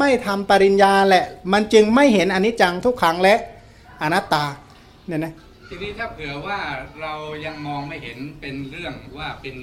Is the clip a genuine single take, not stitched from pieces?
yes; 0 cuts

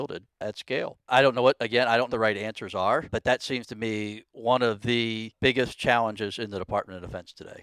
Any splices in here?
yes; 1 cut; at 2.1 s

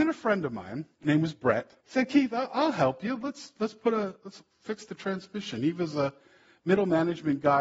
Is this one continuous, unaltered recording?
no; 2 cuts; at 0.9 s, 1.8 s

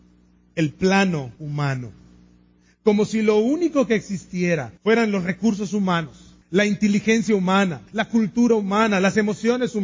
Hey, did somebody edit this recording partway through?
yes; 4 cuts; at 1.4 s, 4.8 s, 6.4 s, 7.9 s

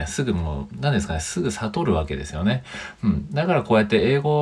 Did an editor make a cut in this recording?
no; 0 cuts

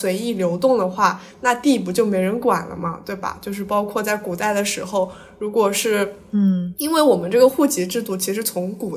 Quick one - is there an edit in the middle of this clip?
no; 0 cuts

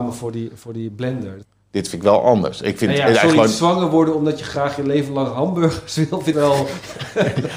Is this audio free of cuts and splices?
no; 1 cut; at 6.3 s

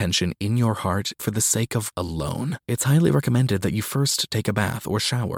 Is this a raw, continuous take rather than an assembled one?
no; 3 cuts; at 1.2 s, 1.9 s, 2.6 s

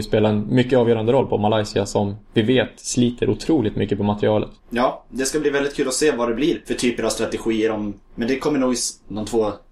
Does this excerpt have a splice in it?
yes; 2 cuts; at 4.6 s, 8.0 s

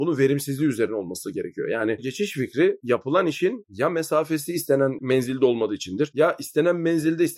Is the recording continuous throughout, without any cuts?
no; 1 cut; at 2.0 s

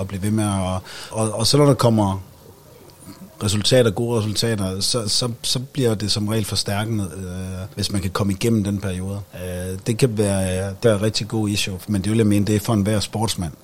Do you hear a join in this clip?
yes; 5 cuts; at 1.1 s, 5.0 s, 7.7 s, 9.3 s, 10.8 s

